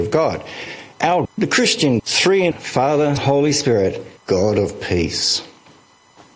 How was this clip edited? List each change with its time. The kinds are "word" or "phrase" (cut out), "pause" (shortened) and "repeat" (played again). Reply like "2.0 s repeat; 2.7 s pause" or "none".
1.3 s word; 2.0 s word; 2.5 s word; 3.2 s word; 4.2 s word